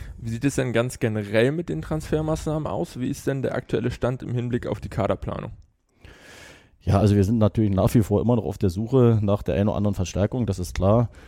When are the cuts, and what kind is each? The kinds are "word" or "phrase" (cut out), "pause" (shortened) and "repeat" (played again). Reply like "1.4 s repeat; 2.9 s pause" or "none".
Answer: none